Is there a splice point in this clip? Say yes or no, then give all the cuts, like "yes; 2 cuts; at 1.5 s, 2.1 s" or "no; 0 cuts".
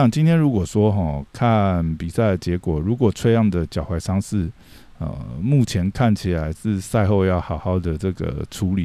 no; 0 cuts